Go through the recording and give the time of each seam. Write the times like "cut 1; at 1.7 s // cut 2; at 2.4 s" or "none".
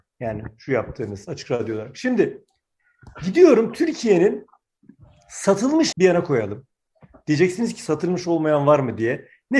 cut 1; at 5.9 s